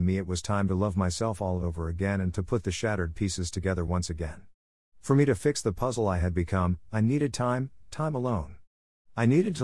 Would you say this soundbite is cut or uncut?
uncut